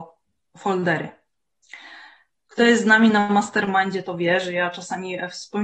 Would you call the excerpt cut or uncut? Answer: uncut